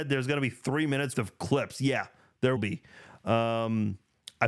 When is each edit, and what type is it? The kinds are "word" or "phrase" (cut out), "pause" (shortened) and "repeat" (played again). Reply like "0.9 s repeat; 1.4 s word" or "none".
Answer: 1.1 s word; 2.6 s word